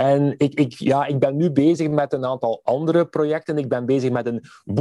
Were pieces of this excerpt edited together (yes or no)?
no